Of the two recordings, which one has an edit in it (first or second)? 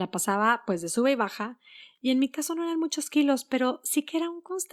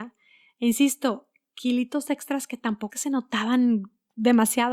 second